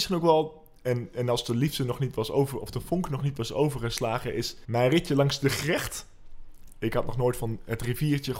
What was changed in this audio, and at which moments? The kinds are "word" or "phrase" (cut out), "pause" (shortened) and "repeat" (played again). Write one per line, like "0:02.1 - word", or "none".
0:04.6 - pause